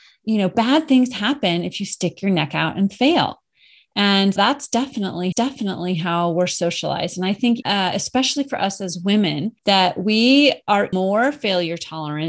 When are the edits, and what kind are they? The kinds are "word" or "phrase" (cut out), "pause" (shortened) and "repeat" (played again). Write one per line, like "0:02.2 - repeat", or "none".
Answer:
0:04.4 - word
0:05.3 - repeat
0:07.6 - word
0:09.6 - pause
0:10.9 - word